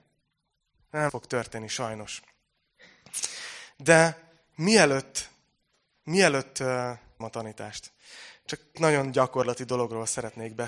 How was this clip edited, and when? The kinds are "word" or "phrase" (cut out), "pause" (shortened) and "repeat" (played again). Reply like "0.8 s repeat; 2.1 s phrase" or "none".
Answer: 1.1 s word; 7.2 s word; 8.8 s word